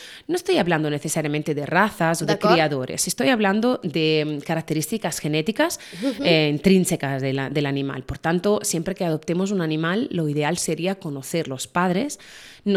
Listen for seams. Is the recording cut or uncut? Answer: uncut